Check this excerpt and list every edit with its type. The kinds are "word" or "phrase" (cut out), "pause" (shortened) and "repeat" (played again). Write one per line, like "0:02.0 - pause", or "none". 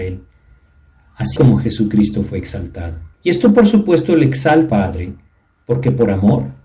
0:01.4 - word
0:03.1 - pause
0:04.7 - word